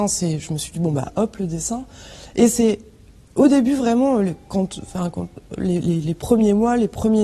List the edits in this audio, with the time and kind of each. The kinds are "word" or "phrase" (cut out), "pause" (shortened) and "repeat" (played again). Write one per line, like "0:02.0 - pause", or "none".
none